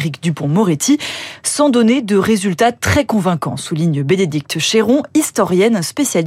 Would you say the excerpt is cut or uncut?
uncut